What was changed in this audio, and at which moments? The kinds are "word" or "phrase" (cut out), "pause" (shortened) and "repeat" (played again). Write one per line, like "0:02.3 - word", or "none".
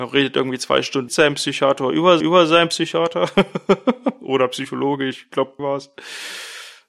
0:01.1 - word
0:02.2 - repeat
0:05.6 - word

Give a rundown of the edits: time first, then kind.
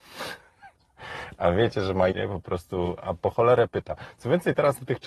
0:02.1 - word

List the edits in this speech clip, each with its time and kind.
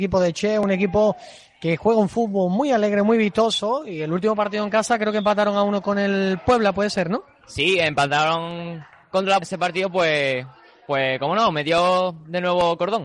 0:09.4 - phrase

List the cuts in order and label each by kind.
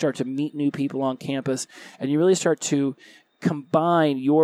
none

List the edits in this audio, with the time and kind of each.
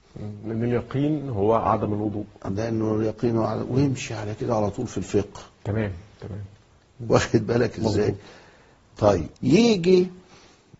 0:09.4 - pause

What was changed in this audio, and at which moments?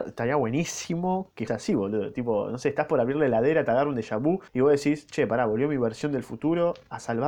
0:01.5 - word
0:04.5 - pause

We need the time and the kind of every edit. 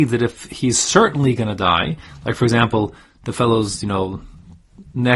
none

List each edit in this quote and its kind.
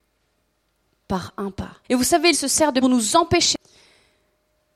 0:01.8 - pause
0:02.3 - word
0:02.8 - phrase

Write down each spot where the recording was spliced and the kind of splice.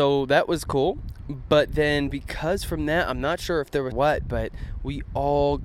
0:03.9 - phrase

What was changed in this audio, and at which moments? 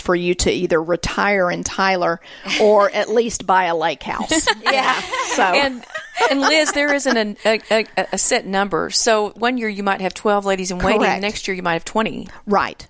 0:07.6 - repeat

